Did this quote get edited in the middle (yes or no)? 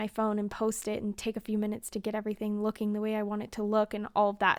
no